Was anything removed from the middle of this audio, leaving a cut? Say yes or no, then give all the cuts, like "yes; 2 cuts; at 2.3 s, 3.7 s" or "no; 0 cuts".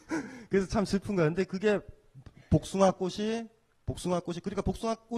no; 0 cuts